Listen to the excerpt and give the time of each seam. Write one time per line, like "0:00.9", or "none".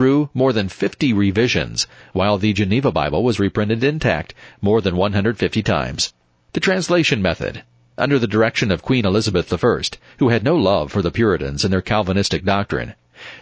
none